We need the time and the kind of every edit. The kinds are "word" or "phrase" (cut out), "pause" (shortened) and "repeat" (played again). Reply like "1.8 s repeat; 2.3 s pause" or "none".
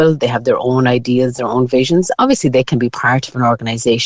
none